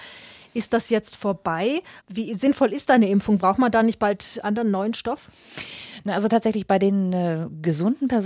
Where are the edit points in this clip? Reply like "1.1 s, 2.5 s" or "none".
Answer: 2.0 s, 4.4 s